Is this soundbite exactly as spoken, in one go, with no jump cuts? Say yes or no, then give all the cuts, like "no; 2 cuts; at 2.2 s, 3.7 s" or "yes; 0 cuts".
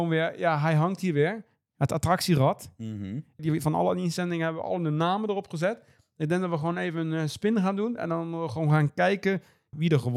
yes; 0 cuts